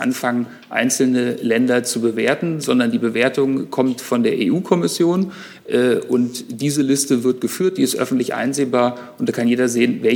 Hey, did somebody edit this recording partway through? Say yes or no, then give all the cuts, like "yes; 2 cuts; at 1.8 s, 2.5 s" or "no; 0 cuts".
no; 0 cuts